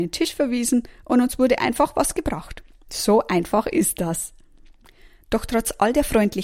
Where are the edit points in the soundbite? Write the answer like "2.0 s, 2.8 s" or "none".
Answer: none